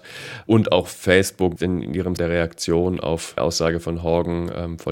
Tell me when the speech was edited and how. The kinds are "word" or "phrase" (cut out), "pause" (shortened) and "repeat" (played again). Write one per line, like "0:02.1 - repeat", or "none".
0:01.6 - word
0:02.2 - word
0:03.4 - word